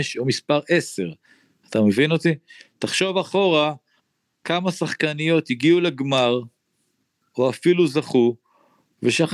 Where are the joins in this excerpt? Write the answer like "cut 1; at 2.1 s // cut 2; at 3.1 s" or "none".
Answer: cut 1; at 4.0 s